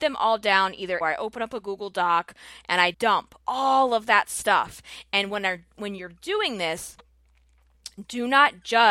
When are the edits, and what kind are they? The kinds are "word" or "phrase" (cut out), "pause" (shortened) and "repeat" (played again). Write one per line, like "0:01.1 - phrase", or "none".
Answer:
0:01.0 - phrase
0:02.9 - word
0:03.4 - pause